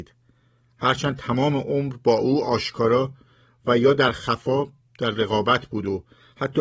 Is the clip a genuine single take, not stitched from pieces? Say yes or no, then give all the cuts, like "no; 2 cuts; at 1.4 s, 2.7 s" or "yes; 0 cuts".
yes; 0 cuts